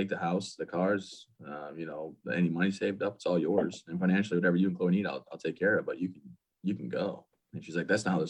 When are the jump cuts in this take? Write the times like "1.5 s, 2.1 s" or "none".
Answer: none

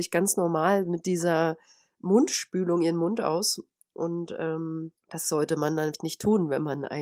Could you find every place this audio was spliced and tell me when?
5.0 s

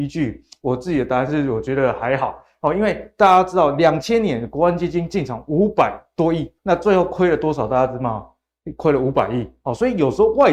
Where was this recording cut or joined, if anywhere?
6.6 s

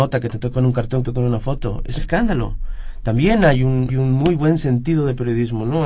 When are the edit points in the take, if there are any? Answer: 1.0 s, 2.0 s, 3.9 s

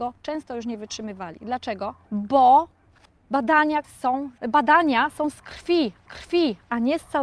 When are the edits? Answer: 2.0 s, 3.8 s, 4.4 s, 6.1 s

